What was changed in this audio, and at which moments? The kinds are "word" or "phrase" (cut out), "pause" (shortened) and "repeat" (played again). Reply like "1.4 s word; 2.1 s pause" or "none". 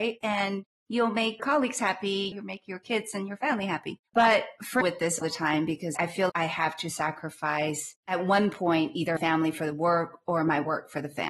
1.4 s word; 4.1 s pause; 4.8 s phrase; 5.2 s word; 6.3 s word; 9.2 s word